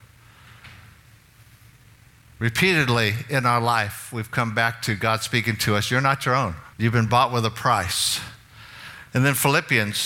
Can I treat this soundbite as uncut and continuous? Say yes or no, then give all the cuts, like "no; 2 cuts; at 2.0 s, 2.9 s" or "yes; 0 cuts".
no; 1 cut; at 6.7 s